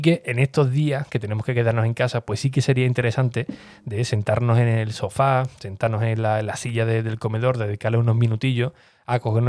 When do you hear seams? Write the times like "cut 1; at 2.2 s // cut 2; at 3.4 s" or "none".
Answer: none